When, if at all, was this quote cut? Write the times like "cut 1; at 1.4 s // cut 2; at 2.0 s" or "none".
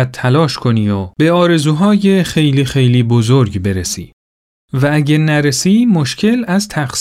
none